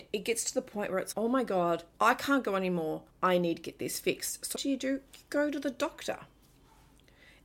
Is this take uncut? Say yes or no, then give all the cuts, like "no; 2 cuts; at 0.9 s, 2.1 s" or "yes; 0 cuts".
no; 4 cuts; at 1.1 s, 1.9 s, 3.1 s, 4.6 s